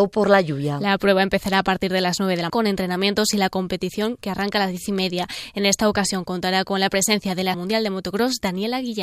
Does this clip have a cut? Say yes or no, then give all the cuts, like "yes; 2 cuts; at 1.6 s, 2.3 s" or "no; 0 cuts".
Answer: yes; 2 cuts; at 2.5 s, 7.5 s